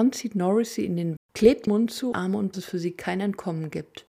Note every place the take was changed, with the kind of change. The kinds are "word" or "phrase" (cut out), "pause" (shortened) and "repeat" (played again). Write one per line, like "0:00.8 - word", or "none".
0:01.2 - word
0:01.7 - word
0:02.1 - phrase
0:02.5 - phrase